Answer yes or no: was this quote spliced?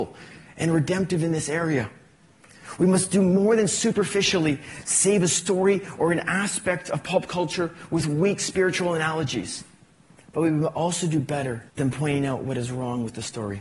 yes